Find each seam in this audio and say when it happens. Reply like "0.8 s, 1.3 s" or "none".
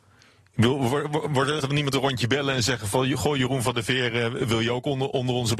1.6 s